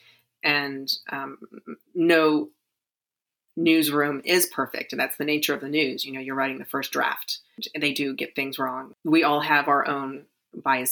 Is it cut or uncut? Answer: uncut